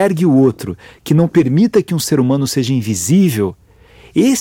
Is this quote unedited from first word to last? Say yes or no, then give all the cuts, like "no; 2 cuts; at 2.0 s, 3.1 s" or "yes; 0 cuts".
yes; 0 cuts